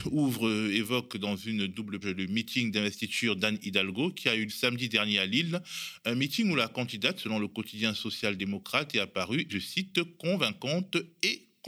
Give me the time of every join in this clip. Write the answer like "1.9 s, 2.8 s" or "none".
1.1 s, 2.0 s, 4.5 s, 9.5 s